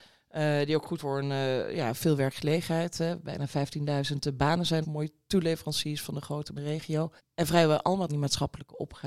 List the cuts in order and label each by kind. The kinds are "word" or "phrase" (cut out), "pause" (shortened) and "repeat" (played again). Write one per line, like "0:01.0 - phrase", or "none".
0:01.0 - word
0:04.8 - word
0:06.6 - phrase
0:07.2 - pause
0:08.1 - phrase